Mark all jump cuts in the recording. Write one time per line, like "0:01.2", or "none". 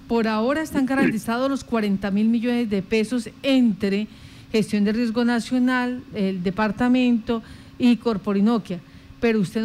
none